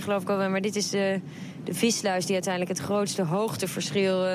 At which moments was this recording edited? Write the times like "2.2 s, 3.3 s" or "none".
none

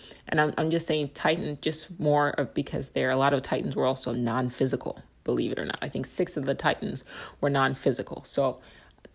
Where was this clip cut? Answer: none

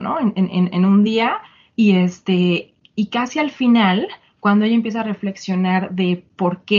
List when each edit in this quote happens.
none

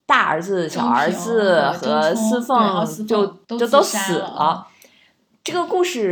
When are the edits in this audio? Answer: 3.4 s

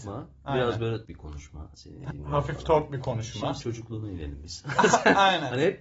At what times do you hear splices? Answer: 1.0 s, 2.1 s, 3.6 s

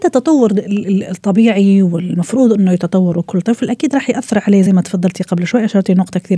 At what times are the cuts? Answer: none

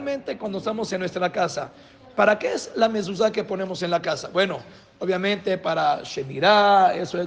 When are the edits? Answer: none

